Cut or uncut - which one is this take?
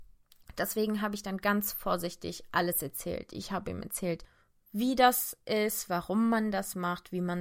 uncut